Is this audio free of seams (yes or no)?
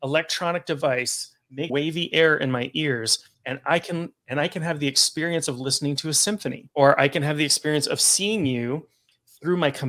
no